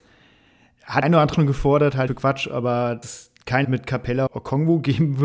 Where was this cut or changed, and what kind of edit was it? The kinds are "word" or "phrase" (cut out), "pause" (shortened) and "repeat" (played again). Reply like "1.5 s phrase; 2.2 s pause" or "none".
1.0 s word; 1.3 s word; 2.1 s word; 3.0 s word; 3.6 s word; 4.3 s word